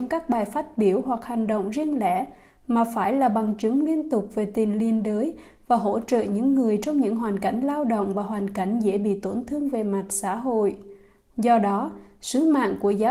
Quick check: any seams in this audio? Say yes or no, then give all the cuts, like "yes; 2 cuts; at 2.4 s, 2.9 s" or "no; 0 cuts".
no; 0 cuts